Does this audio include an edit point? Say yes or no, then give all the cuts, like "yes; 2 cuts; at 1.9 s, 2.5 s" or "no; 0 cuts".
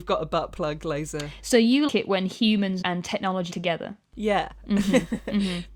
yes; 3 cuts; at 1.9 s, 2.8 s, 3.5 s